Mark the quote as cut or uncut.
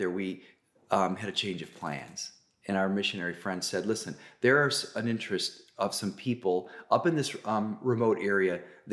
uncut